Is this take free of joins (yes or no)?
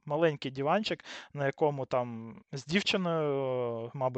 no